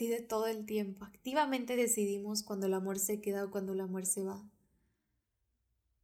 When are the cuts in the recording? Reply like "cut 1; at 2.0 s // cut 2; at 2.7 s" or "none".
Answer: none

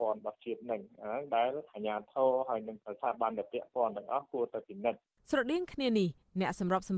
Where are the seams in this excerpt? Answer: none

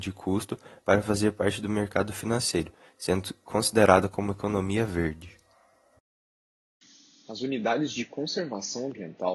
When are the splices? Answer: none

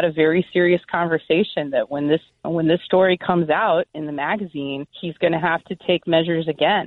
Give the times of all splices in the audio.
cut 1; at 2.4 s // cut 2; at 4.9 s

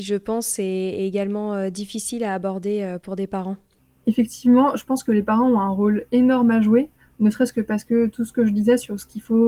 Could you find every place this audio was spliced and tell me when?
none

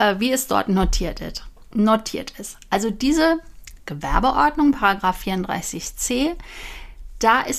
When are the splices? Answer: none

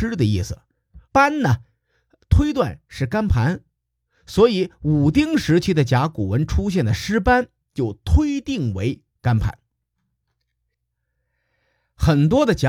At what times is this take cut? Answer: cut 1; at 1.1 s

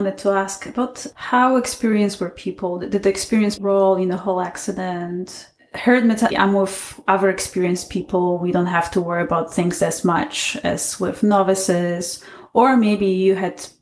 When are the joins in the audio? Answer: cut 1; at 3.6 s // cut 2; at 6.3 s

